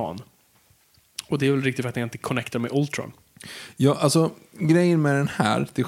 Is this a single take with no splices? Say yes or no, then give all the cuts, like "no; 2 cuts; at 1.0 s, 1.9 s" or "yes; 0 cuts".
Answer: yes; 0 cuts